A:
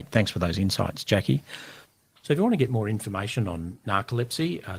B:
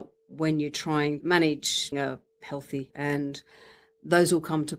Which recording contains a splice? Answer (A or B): B